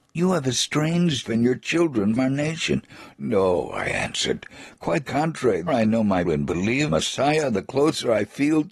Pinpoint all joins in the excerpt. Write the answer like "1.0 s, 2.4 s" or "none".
1.2 s, 2.2 s, 5.0 s, 5.7 s, 6.3 s, 6.9 s